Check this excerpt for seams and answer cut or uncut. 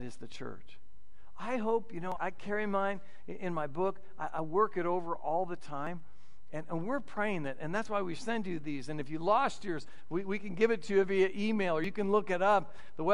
cut